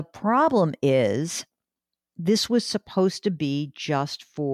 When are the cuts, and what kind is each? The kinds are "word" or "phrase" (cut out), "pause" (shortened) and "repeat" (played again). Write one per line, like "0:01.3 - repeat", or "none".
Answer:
none